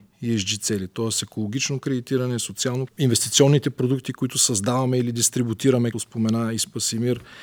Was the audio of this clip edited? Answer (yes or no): yes